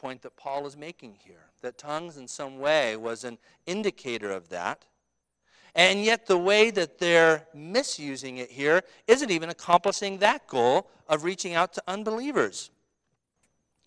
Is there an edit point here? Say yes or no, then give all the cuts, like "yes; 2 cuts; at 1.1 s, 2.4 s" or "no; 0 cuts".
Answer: no; 0 cuts